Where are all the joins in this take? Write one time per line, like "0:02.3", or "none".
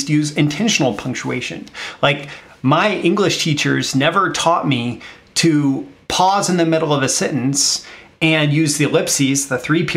none